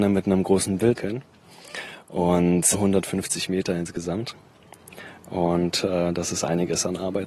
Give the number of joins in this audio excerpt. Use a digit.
2